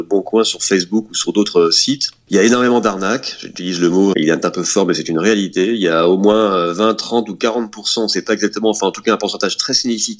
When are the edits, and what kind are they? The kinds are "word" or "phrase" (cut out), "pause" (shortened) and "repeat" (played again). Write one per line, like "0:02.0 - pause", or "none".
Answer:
0:04.1 - word